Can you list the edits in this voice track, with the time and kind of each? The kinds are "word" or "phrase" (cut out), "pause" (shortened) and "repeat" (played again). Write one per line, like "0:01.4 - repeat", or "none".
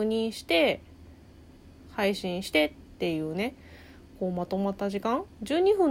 none